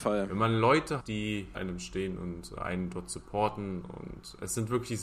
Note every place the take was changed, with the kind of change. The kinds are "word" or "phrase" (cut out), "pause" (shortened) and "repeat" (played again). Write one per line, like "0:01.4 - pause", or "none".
0:01.0 - word
0:01.5 - word
0:02.6 - word

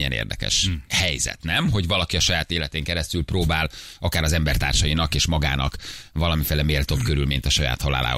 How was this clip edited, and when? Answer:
none

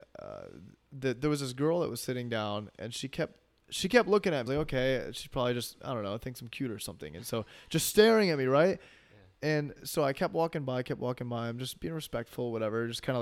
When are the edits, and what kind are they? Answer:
0:04.5 - phrase

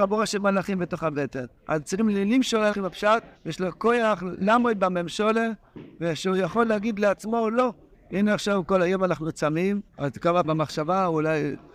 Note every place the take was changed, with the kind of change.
0:01.6 - pause
0:02.7 - word
0:03.4 - pause
0:07.9 - pause
0:09.9 - pause
0:10.4 - phrase

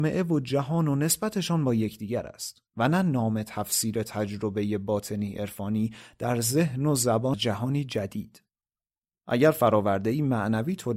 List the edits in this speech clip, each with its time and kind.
0:02.7 - pause
0:07.3 - phrase

